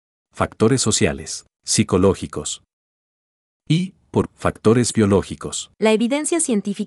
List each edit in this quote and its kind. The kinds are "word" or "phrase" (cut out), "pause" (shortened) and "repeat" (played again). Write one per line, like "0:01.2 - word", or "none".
0:01.5 - pause
0:04.2 - word
0:05.7 - pause